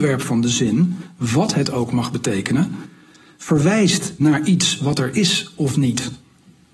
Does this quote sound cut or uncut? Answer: uncut